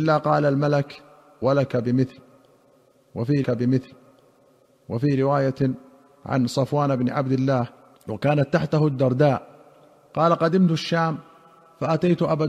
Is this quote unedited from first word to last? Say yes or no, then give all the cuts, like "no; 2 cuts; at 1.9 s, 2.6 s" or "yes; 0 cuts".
no; 2 cuts; at 3.4 s, 8.0 s